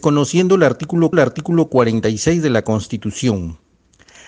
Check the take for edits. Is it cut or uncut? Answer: cut